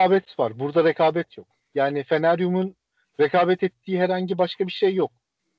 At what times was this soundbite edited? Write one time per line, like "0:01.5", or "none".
none